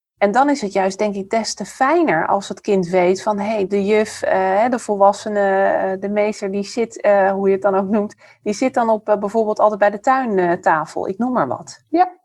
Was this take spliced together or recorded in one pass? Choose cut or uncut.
uncut